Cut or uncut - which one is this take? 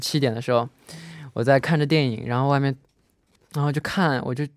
uncut